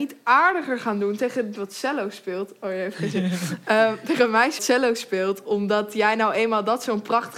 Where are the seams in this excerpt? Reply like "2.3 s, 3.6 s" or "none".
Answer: 1.5 s, 4.6 s